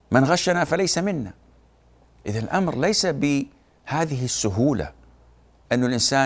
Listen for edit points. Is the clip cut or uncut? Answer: uncut